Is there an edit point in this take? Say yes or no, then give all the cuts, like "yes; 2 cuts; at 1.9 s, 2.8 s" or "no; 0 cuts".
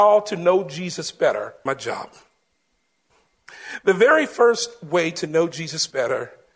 yes; 1 cut; at 1.7 s